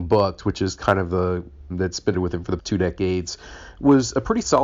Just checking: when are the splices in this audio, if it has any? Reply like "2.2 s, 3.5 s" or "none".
1.7 s, 2.1 s, 2.6 s